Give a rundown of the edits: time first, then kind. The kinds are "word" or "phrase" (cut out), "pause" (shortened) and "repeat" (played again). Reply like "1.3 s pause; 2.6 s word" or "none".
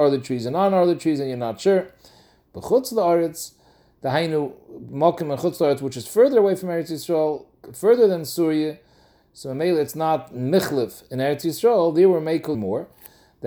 12.5 s word